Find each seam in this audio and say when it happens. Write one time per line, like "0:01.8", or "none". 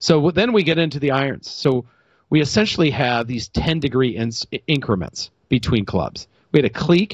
none